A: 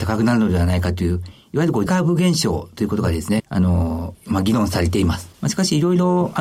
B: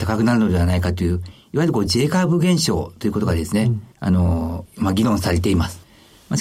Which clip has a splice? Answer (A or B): A